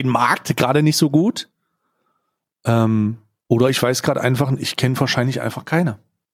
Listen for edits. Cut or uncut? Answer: uncut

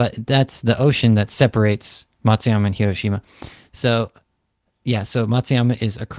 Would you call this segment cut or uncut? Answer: uncut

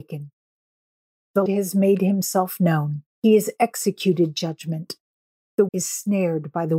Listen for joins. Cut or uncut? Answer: cut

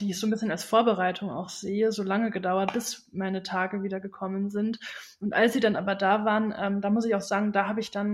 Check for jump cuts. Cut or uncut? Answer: uncut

